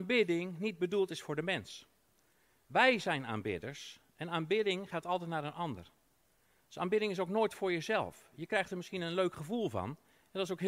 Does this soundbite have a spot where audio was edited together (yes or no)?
no